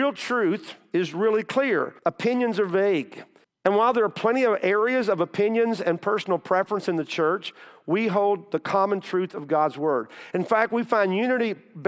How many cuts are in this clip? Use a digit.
2